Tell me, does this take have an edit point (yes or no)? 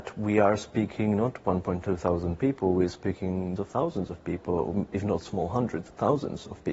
yes